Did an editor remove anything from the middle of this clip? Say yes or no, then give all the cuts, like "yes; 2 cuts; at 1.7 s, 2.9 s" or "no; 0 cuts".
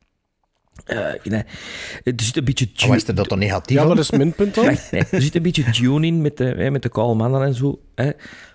no; 0 cuts